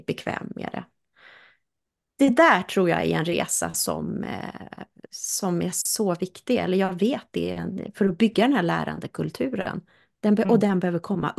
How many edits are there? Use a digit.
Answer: 0